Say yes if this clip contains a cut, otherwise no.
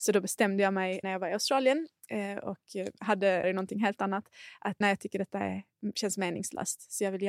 yes